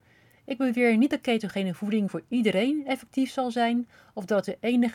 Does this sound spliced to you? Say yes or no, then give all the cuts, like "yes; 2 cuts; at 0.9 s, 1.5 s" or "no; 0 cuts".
no; 0 cuts